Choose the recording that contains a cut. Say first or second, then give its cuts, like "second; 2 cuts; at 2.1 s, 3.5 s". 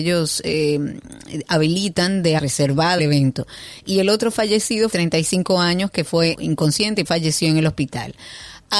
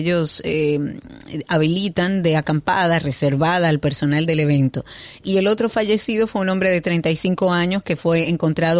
first; 5 cuts; at 2.4 s, 3.0 s, 4.9 s, 6.3 s, 7.0 s